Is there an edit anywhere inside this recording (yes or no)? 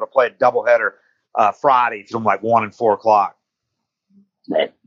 yes